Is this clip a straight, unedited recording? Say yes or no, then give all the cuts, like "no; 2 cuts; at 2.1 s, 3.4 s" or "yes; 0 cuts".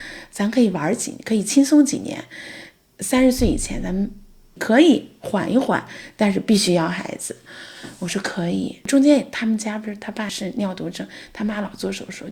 yes; 0 cuts